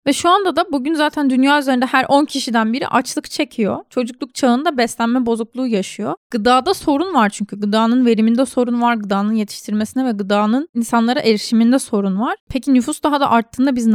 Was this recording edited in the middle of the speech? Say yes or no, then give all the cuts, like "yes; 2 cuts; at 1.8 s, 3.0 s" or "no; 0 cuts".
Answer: no; 0 cuts